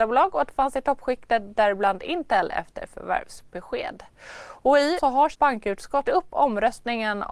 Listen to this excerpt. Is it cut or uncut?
cut